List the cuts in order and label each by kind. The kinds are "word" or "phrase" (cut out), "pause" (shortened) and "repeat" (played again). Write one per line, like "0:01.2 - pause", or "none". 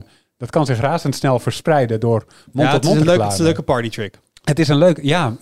none